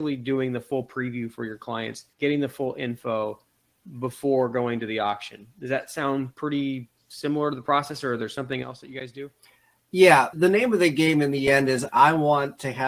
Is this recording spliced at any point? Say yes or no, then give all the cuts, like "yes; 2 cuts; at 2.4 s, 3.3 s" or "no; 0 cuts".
yes; 2 cuts; at 2.1 s, 10.3 s